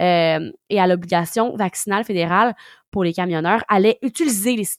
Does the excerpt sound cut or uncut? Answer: uncut